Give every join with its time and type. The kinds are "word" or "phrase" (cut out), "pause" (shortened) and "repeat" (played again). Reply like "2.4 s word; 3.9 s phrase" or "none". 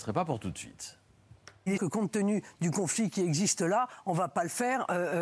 1.8 s word